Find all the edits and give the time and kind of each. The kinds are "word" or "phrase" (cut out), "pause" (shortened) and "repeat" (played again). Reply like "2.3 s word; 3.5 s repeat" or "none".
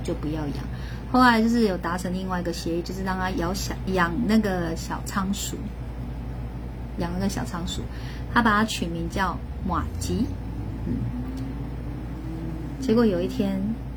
3.9 s word